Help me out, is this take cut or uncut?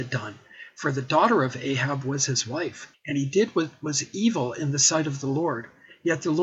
cut